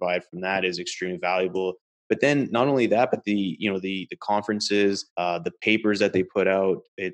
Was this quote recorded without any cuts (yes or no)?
no